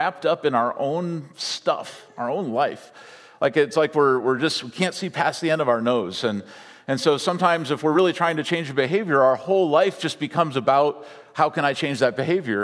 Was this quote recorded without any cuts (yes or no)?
yes